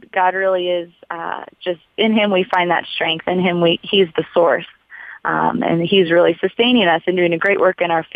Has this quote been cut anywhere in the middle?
no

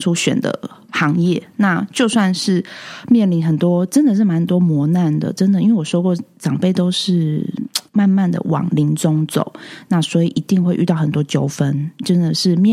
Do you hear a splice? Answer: yes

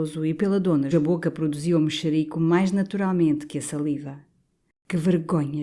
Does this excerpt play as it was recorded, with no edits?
no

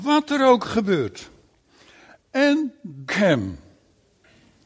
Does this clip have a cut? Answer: yes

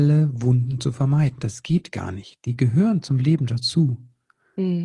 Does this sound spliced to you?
no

